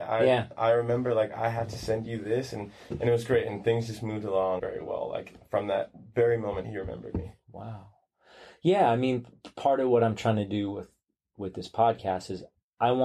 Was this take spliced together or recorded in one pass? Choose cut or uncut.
cut